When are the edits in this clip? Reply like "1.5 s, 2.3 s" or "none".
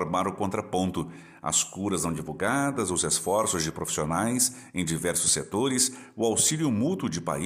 none